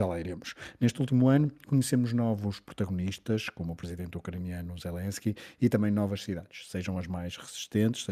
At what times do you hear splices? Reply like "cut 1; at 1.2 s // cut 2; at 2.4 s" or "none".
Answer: none